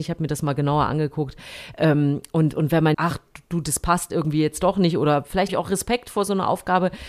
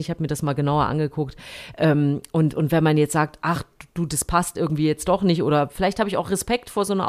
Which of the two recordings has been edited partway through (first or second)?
first